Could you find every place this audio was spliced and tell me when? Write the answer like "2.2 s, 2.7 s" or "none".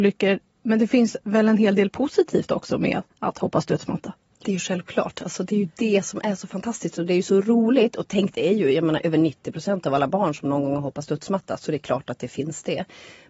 1.2 s, 3.1 s, 4.4 s